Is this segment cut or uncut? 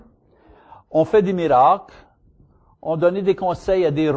uncut